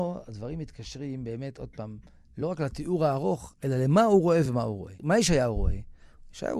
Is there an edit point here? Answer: no; 0 cuts

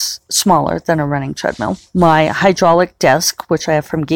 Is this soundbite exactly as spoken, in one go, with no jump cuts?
no; 1 cut; at 1.9 s

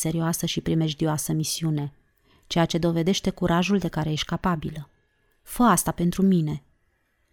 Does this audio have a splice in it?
no; 0 cuts

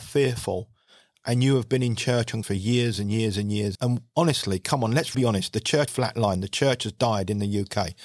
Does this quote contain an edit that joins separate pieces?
yes; 4 cuts; at 2.4 s, 3.7 s, 5.1 s, 5.9 s

